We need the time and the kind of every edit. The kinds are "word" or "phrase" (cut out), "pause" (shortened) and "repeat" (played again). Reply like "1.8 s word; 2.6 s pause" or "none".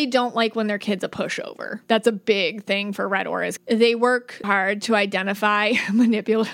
1.8 s pause; 3.6 s word; 4.4 s word